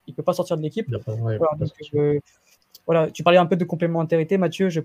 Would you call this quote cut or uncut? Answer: uncut